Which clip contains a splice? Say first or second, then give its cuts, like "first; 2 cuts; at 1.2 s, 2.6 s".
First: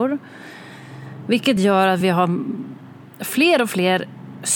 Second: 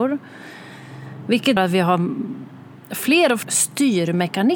second; 2 cuts; at 1.6 s, 3.4 s